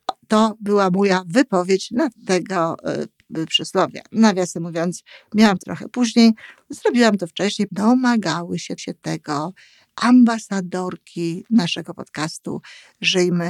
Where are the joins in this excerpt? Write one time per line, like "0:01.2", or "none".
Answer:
0:02.1
0:05.6
0:07.7
0:08.8